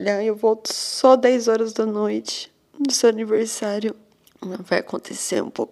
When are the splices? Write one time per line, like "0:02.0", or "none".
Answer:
0:04.3